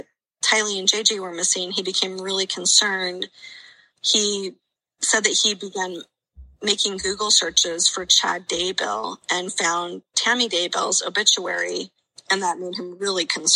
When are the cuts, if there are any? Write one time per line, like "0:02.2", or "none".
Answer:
none